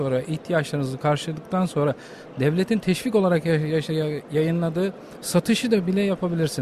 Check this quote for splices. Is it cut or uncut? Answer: uncut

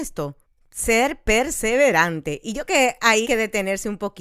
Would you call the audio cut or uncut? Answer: cut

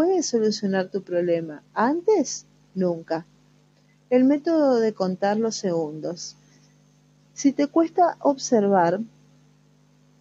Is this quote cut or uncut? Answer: uncut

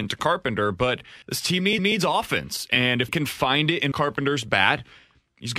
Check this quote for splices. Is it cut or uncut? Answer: cut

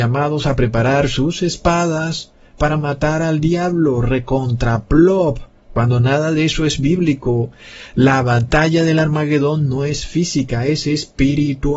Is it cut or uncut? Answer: uncut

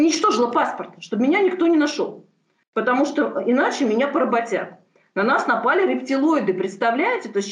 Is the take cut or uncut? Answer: uncut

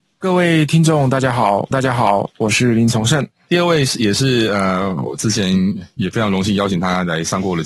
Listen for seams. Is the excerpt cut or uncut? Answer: cut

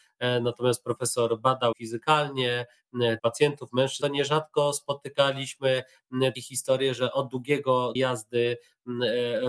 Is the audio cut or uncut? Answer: cut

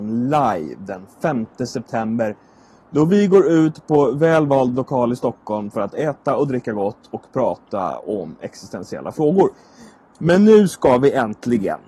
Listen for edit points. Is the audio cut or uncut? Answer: uncut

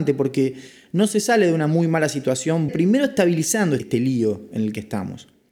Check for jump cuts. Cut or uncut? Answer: cut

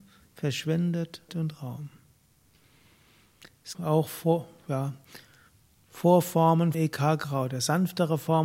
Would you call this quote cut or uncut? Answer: cut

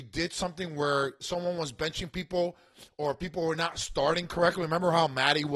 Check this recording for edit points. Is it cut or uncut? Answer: uncut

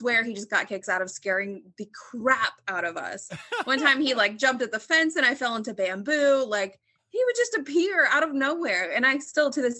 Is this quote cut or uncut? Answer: uncut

